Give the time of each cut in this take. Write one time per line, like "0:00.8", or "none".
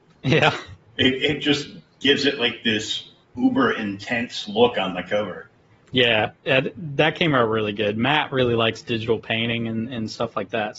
0:03.2